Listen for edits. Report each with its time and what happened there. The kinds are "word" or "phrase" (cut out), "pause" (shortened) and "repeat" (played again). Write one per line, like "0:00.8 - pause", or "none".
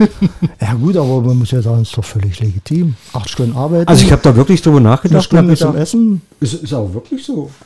none